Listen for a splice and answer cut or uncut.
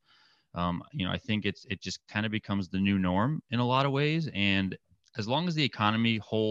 uncut